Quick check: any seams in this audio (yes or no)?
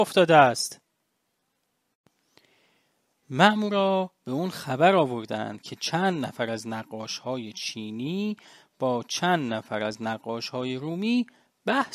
no